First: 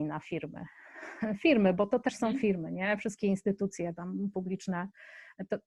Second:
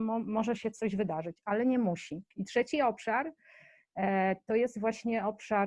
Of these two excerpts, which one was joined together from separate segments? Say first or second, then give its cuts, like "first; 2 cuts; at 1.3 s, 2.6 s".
second; 1 cut; at 2.3 s